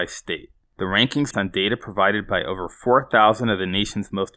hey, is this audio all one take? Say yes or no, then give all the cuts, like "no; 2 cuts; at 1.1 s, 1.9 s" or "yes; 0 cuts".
no; 1 cut; at 1.3 s